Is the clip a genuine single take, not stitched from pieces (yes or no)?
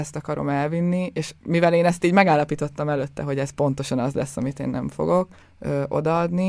no